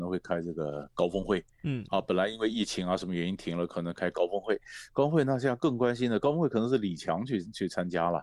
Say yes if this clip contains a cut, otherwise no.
no